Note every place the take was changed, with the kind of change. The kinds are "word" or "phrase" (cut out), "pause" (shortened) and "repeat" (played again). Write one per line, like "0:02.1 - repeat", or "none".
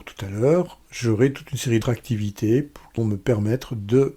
0:01.8 - word
0:03.0 - word

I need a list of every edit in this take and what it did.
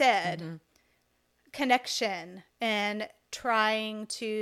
none

